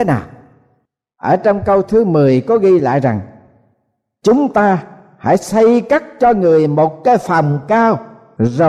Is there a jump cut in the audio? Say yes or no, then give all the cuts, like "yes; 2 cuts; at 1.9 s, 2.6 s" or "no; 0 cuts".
no; 0 cuts